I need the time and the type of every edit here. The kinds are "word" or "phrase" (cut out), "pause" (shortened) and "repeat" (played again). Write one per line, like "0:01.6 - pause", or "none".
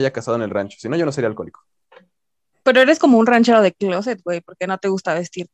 none